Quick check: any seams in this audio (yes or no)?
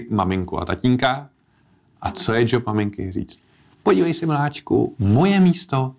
no